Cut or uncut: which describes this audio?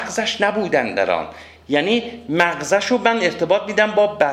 uncut